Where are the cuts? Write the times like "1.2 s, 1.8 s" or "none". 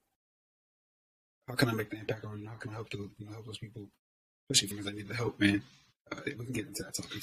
4.7 s